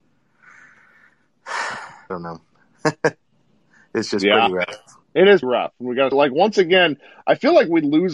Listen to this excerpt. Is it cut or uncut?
cut